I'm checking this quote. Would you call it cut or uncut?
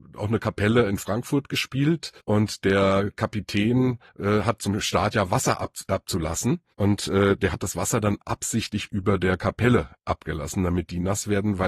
cut